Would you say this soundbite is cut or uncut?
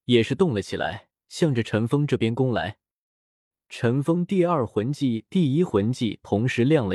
cut